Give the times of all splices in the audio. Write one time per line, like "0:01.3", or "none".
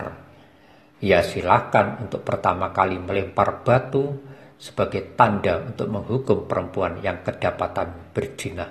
none